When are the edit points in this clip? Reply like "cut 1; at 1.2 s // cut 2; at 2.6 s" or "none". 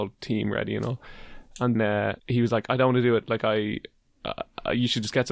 cut 1; at 1.7 s // cut 2; at 2.2 s